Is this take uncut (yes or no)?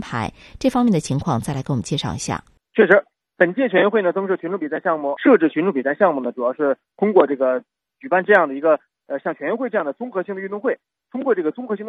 yes